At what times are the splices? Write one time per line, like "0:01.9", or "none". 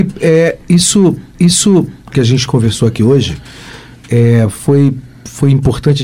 0:01.3

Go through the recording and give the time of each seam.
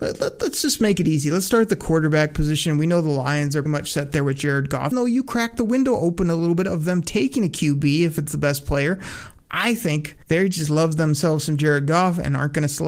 0:03.7
0:04.9
0:10.2

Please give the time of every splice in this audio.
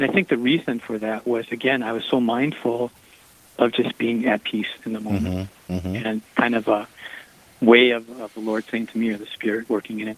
none

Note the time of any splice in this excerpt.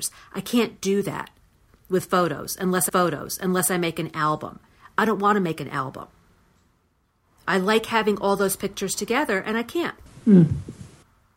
0:02.9

